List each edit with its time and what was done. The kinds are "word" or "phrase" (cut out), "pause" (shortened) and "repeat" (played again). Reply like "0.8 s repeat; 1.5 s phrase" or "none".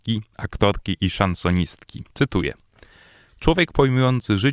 2.1 s pause